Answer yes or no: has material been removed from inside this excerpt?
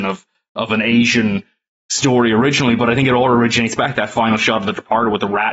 no